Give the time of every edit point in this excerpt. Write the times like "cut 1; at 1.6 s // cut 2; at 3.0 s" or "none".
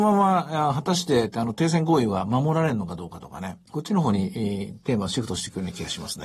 cut 1; at 3.7 s